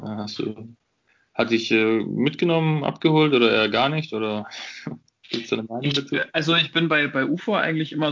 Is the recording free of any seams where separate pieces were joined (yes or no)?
yes